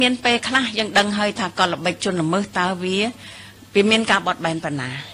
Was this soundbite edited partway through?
no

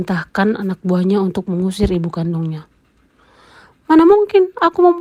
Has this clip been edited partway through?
no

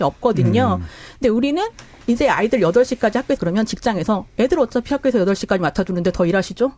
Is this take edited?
yes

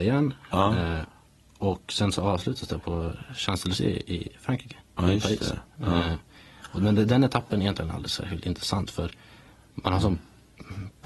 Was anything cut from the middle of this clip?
no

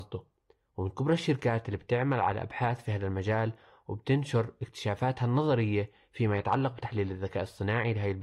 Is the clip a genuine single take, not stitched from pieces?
yes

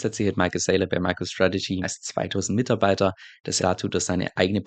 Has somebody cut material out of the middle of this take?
yes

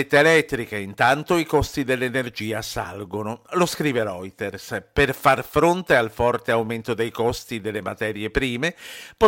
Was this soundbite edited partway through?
no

